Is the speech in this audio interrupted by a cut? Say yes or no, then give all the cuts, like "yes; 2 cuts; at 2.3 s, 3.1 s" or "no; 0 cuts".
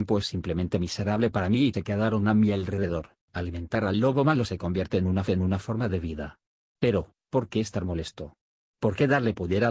yes; 3 cuts; at 1.7 s, 3.2 s, 5.3 s